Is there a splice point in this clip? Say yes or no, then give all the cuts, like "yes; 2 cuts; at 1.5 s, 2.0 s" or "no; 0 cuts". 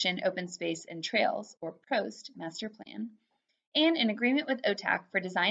no; 0 cuts